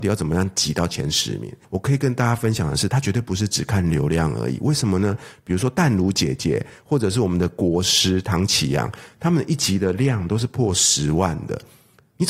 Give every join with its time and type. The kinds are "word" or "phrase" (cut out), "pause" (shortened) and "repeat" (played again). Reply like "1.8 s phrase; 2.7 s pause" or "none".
1.6 s pause